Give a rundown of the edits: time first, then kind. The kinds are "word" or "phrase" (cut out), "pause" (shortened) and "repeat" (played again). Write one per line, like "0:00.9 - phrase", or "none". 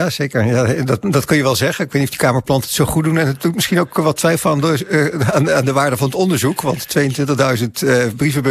none